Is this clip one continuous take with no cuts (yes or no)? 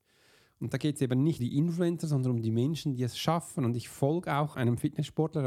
no